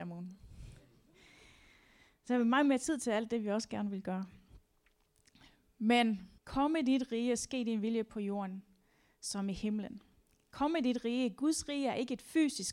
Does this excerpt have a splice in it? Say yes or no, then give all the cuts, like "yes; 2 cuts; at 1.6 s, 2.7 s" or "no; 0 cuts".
yes; 1 cut; at 6.4 s